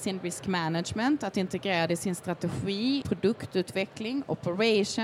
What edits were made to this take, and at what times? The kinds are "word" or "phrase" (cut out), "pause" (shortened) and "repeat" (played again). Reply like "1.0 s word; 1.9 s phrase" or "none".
3.0 s word